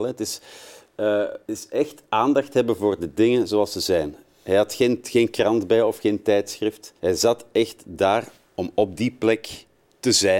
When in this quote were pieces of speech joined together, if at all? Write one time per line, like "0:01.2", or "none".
0:01.4
0:07.0
0:08.4